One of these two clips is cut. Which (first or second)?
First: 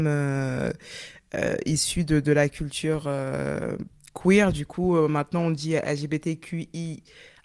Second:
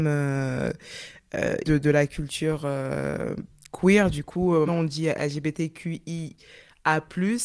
second